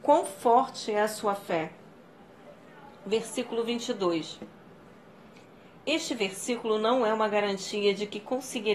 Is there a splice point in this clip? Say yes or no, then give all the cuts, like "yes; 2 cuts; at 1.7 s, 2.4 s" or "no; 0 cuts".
no; 0 cuts